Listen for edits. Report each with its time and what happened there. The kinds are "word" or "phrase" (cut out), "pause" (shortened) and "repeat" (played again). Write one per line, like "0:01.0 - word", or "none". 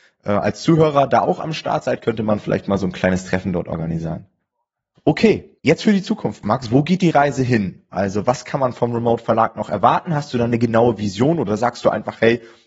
0:05.6 - pause

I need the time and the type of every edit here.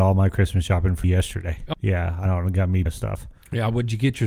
0:01.0 - word
0:01.7 - word
0:02.3 - word
0:02.9 - word

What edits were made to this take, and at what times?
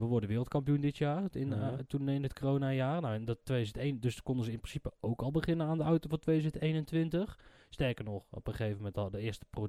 none

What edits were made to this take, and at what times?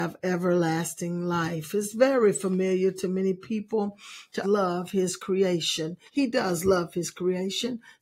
0:04.4 - phrase
0:06.1 - pause

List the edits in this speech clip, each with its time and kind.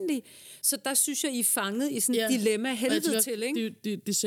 none

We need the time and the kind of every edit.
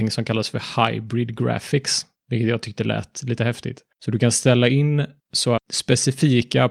0:05.6 - word

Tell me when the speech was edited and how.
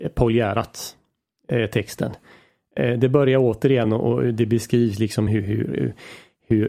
none

